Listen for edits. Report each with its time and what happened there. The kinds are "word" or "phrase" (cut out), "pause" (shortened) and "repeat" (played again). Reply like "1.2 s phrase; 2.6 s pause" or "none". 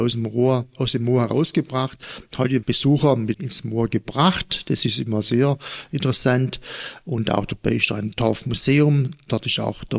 2.6 s phrase; 3.3 s phrase